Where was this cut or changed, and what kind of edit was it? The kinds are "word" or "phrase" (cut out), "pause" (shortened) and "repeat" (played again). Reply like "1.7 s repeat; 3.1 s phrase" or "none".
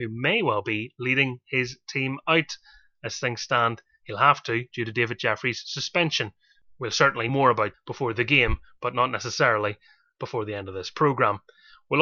7.3 s word; 7.7 s word